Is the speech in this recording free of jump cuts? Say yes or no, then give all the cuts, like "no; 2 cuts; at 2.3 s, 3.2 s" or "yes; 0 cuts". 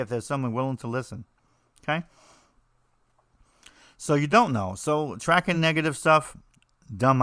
yes; 0 cuts